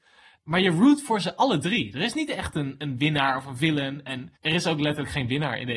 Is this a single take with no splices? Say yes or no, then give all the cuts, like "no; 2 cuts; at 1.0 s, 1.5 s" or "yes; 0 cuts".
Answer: no; 1 cut; at 4.4 s